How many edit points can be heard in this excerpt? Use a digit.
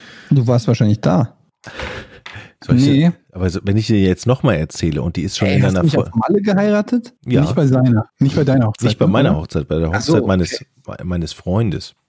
2